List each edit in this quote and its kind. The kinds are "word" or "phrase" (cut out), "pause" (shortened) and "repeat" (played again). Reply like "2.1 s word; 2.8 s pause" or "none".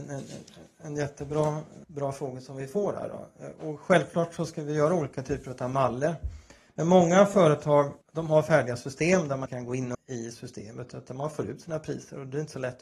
1.8 s pause; 8.0 s pause; 9.5 s word; 9.9 s word